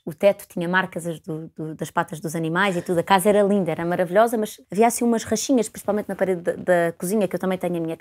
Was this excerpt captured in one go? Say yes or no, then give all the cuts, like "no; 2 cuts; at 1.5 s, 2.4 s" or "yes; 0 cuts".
no; 1 cut; at 4.6 s